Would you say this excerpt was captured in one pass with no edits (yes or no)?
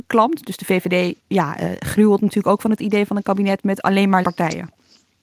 no